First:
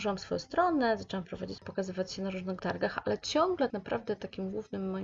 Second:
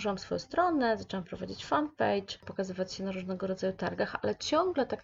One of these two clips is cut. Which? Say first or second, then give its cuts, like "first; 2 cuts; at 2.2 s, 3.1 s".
first; 3 cuts; at 1.6 s, 2.6 s, 3.7 s